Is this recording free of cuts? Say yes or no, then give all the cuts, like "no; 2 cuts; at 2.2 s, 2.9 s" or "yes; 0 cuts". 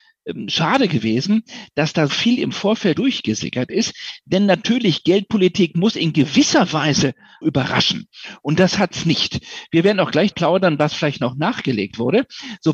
no; 4 cuts; at 2.1 s, 2.9 s, 7.4 s, 10.3 s